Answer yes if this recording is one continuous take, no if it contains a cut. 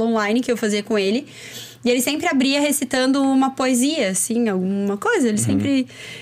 yes